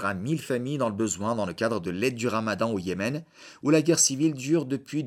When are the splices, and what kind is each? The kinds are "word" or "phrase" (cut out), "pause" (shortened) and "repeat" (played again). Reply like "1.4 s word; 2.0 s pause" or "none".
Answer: none